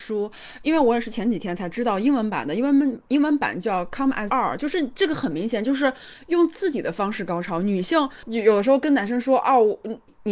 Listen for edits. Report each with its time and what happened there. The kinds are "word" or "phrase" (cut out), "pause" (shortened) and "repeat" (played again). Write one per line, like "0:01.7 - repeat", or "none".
0:04.3 - word